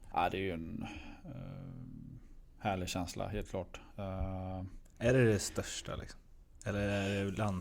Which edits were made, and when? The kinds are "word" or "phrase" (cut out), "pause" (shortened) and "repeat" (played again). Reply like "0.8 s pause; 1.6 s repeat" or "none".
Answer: none